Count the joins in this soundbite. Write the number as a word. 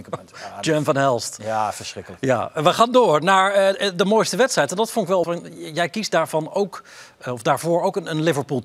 one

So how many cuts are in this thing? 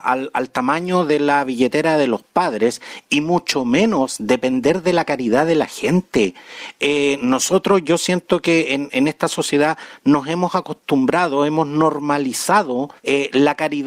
one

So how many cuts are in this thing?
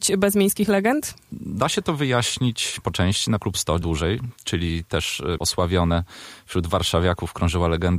four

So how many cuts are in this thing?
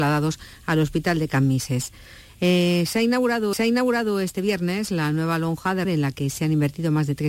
two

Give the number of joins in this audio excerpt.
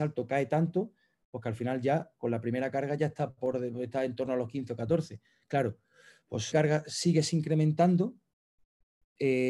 one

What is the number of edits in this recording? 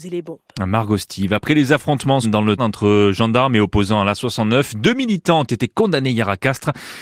two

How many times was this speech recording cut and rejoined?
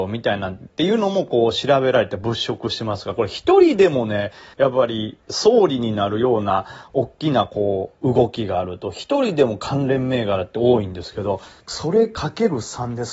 four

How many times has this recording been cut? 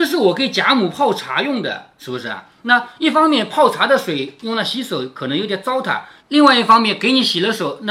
zero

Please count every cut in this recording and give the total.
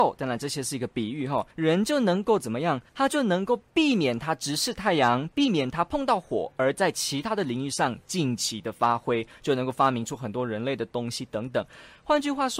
two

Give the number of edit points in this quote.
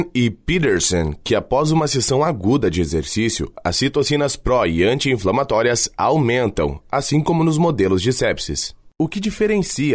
one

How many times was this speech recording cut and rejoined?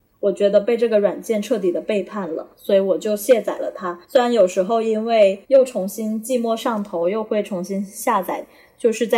three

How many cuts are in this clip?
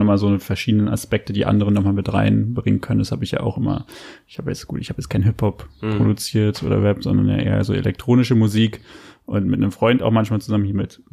zero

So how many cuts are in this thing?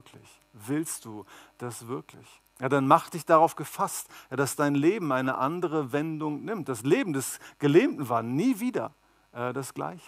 one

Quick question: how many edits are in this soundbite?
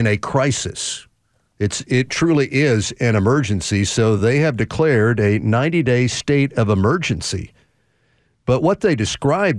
zero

